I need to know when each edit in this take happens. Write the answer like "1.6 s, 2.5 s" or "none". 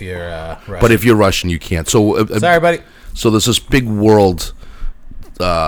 none